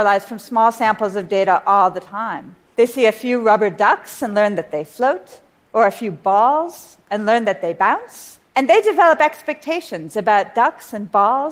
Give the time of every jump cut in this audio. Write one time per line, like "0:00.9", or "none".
0:02.7
0:05.5
0:08.5